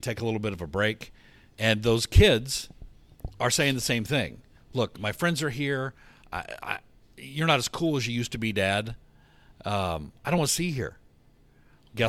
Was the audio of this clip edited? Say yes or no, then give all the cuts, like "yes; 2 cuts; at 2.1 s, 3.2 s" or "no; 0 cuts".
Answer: no; 0 cuts